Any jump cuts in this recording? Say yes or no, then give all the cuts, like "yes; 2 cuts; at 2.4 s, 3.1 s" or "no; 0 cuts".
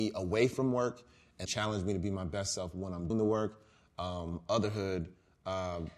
yes; 2 cuts; at 1.5 s, 3.1 s